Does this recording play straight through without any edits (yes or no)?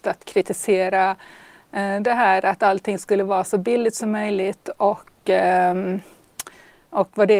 yes